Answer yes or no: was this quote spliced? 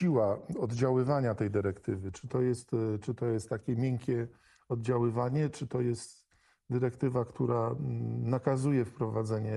no